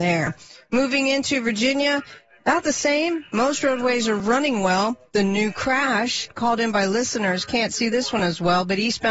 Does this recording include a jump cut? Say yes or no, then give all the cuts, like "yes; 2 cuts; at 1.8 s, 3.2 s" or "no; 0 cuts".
no; 0 cuts